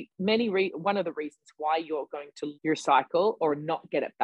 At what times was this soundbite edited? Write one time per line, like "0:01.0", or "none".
0:02.5

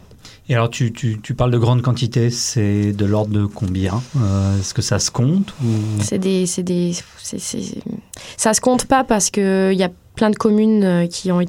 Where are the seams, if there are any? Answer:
0:07.1

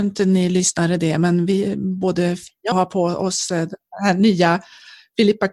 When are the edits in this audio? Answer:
0:02.7

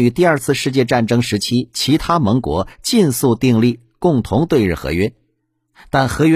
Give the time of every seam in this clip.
none

